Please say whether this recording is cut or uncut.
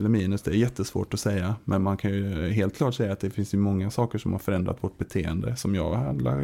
uncut